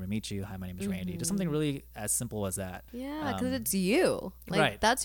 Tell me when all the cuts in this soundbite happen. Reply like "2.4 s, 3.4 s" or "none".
2.9 s